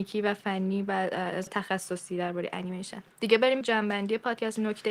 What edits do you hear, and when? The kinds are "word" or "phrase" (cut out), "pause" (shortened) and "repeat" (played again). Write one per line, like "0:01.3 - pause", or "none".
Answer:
0:01.5 - word
0:03.1 - pause
0:03.6 - word